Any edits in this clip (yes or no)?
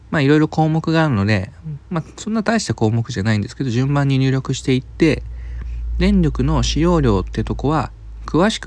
no